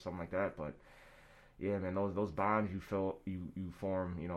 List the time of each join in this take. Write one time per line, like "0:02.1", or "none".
none